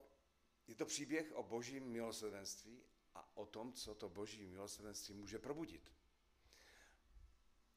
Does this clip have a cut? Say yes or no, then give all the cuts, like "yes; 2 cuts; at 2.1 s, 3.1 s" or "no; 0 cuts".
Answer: no; 0 cuts